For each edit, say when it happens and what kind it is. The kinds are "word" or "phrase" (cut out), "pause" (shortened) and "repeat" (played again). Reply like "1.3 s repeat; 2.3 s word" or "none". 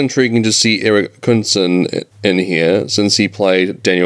2.1 s pause